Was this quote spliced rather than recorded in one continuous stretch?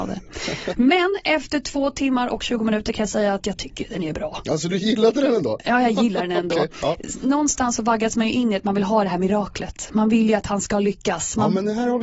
no; 0 cuts

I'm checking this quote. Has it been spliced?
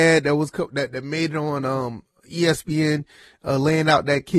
no; 0 cuts

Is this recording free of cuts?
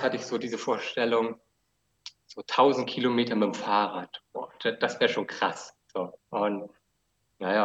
yes; 0 cuts

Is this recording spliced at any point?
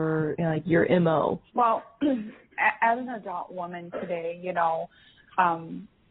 yes; 1 cut; at 1.5 s

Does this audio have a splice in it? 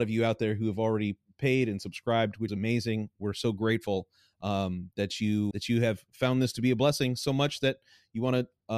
yes; 2 cuts; at 2.5 s, 5.5 s

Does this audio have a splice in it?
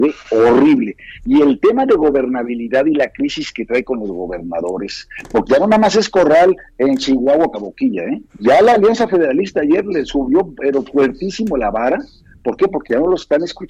yes; 2 cuts; at 7.5 s, 8.3 s

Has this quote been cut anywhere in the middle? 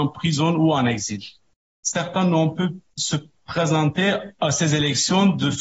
no; 0 cuts

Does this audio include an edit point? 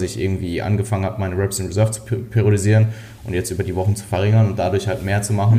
no; 0 cuts

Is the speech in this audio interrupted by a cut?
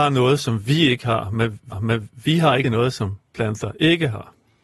yes; 2 cuts; at 1.7 s, 2.6 s

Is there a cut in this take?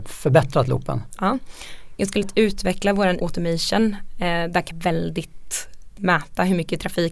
yes; 4 cuts; at 2.2 s, 3.2 s, 4.7 s, 6.0 s

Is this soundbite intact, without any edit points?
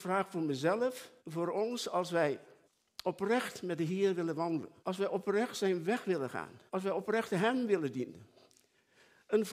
no; 4 cuts; at 1.2 s, 2.6 s, 4.8 s, 6.7 s

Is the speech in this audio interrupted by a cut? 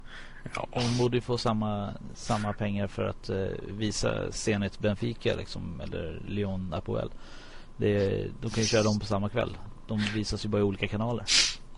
no; 0 cuts

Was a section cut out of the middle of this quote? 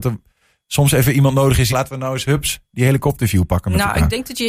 yes; 1 cut; at 1.7 s

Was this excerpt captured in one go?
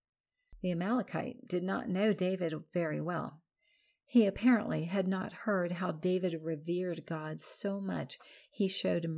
yes; 0 cuts

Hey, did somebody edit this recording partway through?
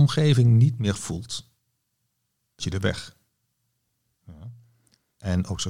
yes; 2 cuts; at 0.9 s, 2.6 s

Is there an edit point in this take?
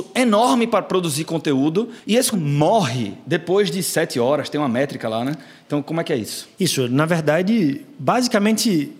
yes; 1 cut; at 2.3 s

